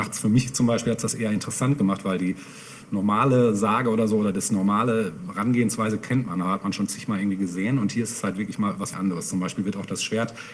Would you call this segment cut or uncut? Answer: cut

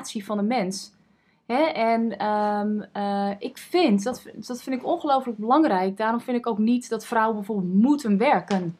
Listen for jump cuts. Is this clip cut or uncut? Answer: uncut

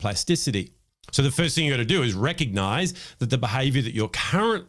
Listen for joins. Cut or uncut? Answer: uncut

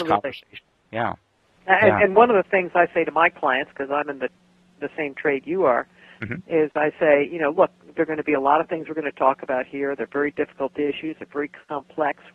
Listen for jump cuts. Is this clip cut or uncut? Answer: uncut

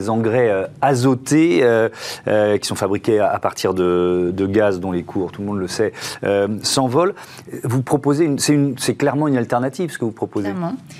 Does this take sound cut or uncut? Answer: uncut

